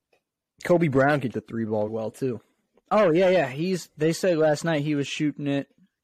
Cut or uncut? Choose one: cut